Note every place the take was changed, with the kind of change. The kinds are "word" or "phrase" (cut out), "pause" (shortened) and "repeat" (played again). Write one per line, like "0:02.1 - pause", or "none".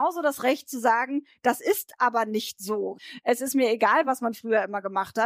none